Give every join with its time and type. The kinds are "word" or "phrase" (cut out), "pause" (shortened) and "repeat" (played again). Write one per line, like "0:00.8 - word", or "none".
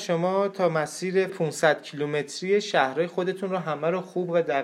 0:01.3 - word